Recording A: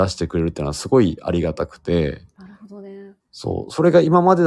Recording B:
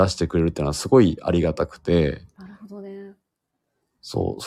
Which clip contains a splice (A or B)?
A